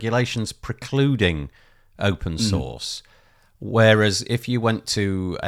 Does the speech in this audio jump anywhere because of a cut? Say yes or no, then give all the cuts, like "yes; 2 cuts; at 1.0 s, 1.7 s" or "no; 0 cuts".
no; 0 cuts